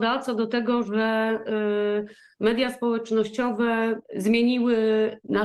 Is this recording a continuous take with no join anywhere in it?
yes; 0 cuts

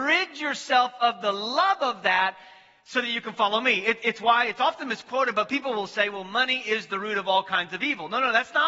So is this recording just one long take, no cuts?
yes; 0 cuts

